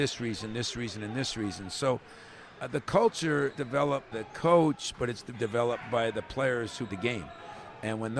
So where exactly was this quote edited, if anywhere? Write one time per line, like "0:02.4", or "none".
0:03.5
0:04.1
0:05.3
0:06.9

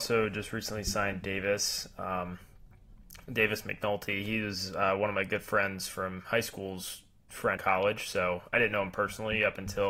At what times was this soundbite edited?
0:07.6

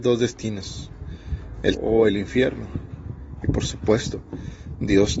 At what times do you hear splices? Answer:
0:01.7

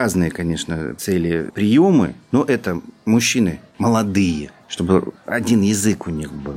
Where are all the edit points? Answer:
0:01.0
0:04.6

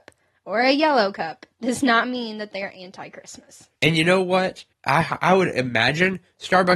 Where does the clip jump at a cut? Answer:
0:03.8
0:04.7

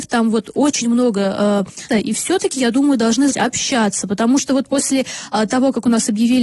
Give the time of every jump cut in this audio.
0:01.9
0:03.3

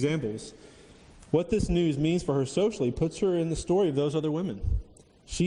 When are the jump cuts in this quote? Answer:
none

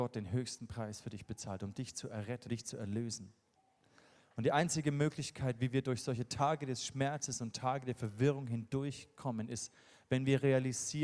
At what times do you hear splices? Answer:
0:02.5
0:03.6

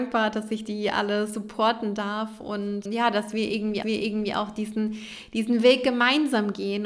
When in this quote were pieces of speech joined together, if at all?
0:02.8
0:03.8

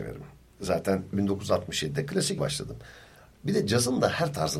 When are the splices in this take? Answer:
0:01.1
0:02.4

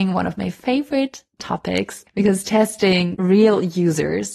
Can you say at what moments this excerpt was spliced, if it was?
0:02.1
0:03.1

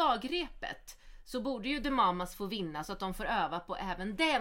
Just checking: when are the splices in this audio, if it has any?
none

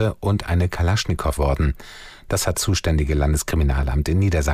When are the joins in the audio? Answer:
0:01.4
0:02.5

